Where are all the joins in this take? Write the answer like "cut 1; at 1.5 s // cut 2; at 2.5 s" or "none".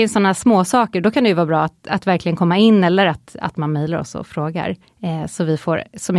cut 1; at 4.8 s